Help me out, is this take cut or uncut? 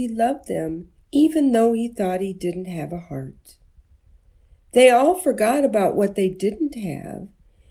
cut